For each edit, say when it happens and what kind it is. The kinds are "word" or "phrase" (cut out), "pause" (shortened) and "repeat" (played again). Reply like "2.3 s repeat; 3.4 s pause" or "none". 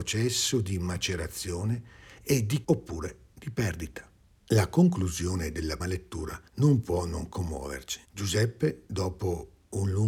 2.6 s word; 4.2 s pause; 5.8 s word; 6.5 s pause; 8.0 s pause